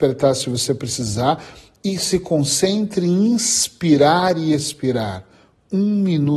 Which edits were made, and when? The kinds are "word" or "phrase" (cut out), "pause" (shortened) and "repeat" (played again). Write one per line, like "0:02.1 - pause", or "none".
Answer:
none